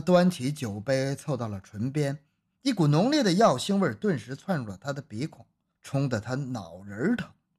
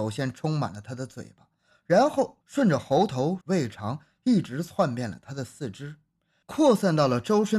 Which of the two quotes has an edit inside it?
second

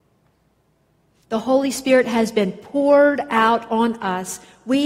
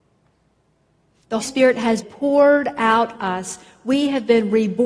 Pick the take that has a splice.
second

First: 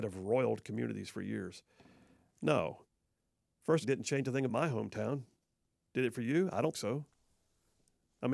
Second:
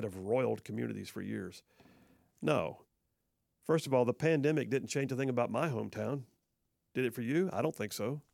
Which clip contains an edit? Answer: first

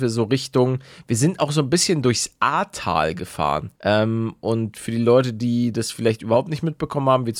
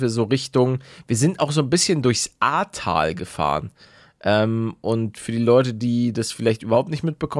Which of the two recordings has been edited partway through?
first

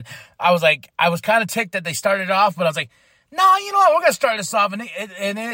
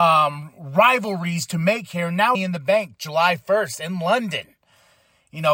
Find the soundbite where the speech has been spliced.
second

